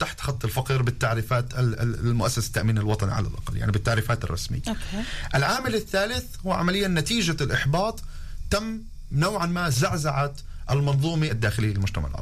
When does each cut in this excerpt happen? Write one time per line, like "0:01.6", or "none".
0:11.3